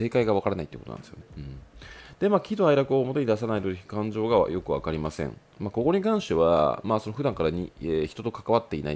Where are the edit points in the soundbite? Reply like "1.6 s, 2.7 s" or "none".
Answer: 1.3 s